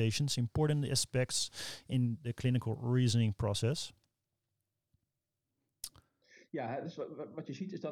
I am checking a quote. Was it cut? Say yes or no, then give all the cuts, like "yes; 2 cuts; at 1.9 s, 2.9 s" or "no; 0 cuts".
no; 0 cuts